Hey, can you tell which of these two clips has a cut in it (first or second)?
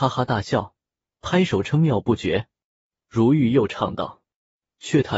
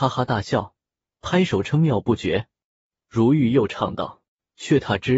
second